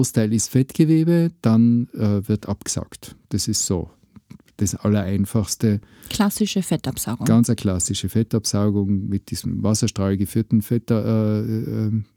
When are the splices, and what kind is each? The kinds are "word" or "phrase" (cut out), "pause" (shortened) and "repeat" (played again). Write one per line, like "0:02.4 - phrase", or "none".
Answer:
none